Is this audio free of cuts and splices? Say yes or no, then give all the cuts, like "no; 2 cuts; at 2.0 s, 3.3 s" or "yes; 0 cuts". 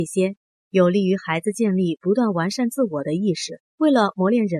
no; 1 cut; at 3.7 s